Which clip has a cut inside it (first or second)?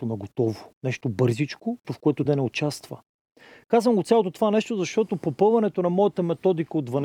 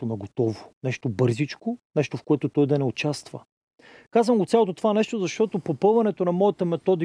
first